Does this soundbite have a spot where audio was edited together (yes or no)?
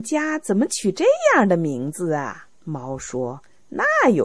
yes